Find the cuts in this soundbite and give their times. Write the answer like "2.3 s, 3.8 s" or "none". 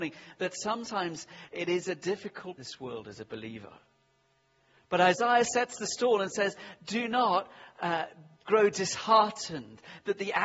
2.6 s